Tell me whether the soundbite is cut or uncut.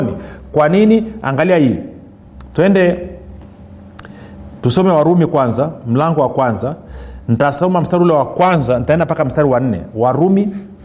uncut